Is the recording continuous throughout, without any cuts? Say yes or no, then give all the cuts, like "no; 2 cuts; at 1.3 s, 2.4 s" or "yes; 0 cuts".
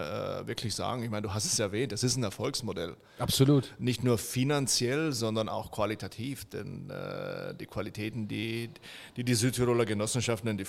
yes; 0 cuts